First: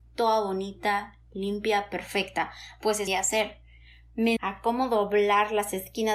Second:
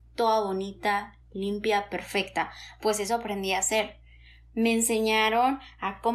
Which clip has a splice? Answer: first; 2 cuts; at 3.1 s, 4.4 s

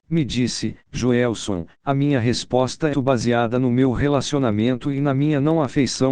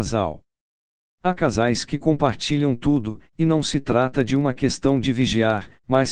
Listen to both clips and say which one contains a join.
first; 1 cut; at 2.9 s

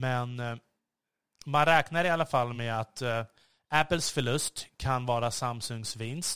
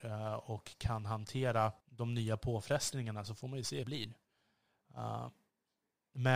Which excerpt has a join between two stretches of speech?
second; 2 cuts; at 1.8 s, 3.8 s

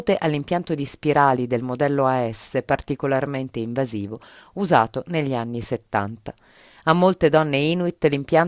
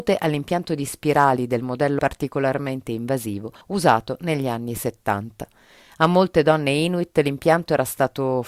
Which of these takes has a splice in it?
second; 2 cuts; at 2.0 s, 3.6 s

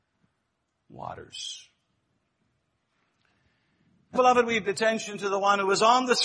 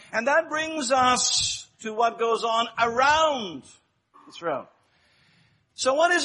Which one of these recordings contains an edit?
first; 2 cuts; at 4.2 s, 4.7 s

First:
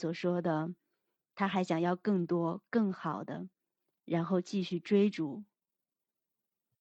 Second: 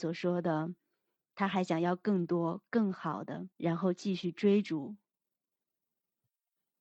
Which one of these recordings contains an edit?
second; 1 cut; at 3.5 s

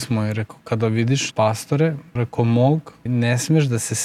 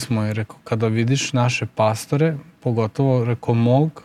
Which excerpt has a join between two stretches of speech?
first; 3 cuts; at 1.3 s, 2.2 s, 3.1 s

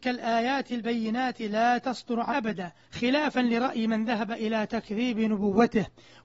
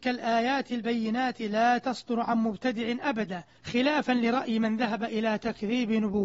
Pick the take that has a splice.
first; 1 cut; at 2.3 s

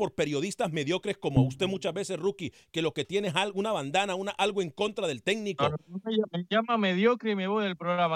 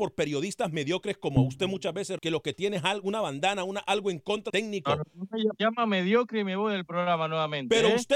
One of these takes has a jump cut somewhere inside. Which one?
second; 3 cuts; at 2.2 s, 4.5 s, 5.6 s

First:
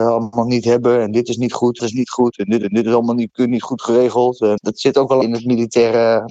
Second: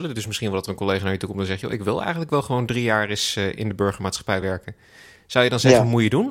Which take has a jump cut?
first; 4 cuts; at 1.8 s, 2.6 s, 4.6 s, 5.2 s

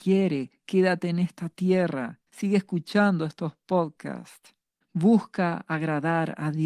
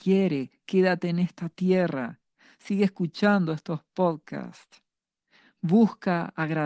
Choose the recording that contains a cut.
first; 2 cuts; at 2.3 s, 4.8 s

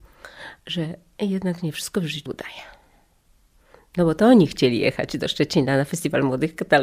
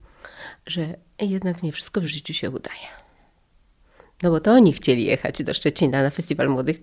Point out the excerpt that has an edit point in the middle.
first; 1 cut; at 2.3 s

